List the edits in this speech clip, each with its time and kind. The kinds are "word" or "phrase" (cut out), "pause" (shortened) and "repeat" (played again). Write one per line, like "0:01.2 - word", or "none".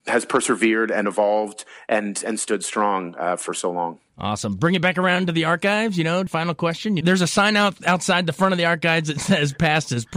none